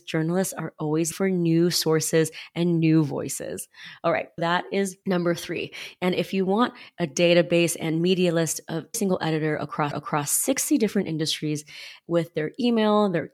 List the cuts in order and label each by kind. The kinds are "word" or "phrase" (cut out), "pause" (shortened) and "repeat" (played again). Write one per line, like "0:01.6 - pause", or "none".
0:01.1 - word
0:04.4 - word
0:08.9 - word
0:09.9 - repeat